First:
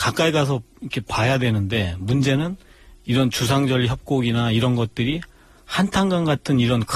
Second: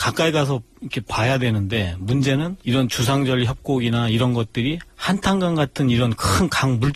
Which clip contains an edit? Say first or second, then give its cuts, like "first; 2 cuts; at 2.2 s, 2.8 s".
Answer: second; 2 cuts; at 2.6 s, 4.9 s